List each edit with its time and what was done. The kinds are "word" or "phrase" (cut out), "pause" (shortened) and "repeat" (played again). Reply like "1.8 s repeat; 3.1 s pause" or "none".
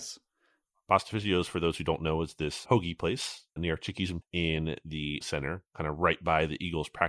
2.7 s word; 3.6 s word; 4.2 s word; 5.2 s word